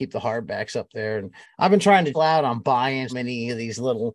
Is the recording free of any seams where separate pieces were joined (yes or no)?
no